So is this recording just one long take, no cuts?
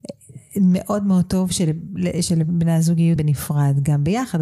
no; 1 cut; at 3.2 s

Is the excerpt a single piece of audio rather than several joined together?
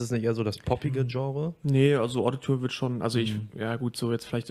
yes; 0 cuts

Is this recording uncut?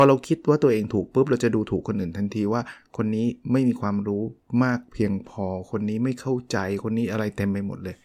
no; 1 cut; at 3.4 s

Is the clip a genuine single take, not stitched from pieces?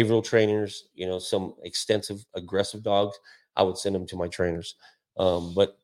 yes; 0 cuts

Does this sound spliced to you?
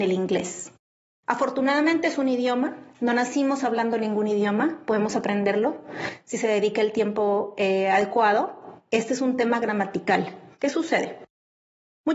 no; 0 cuts

